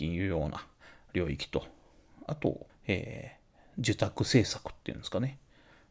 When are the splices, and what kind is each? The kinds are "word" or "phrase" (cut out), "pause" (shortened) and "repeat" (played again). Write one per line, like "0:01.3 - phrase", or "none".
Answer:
0:02.7 - pause